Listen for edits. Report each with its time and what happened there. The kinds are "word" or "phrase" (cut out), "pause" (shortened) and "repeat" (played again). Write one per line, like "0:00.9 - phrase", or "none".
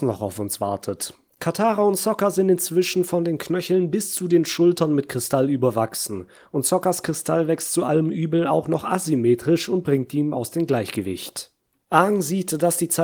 none